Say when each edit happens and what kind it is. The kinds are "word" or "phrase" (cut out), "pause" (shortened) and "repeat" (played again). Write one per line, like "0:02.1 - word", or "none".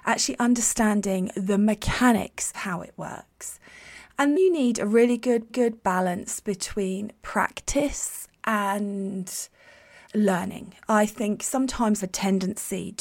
0:02.5 - word
0:04.4 - word
0:05.5 - repeat
0:10.1 - word
0:12.0 - phrase